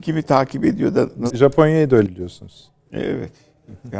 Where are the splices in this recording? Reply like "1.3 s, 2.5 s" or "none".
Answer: 1.3 s, 2.1 s